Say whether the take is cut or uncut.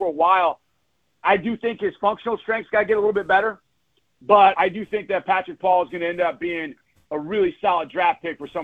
uncut